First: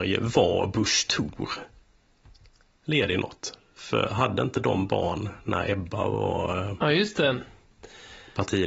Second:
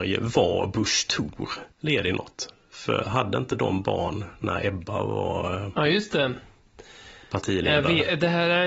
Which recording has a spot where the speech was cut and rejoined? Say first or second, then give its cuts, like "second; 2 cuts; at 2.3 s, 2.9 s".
second; 1 cut; at 1.7 s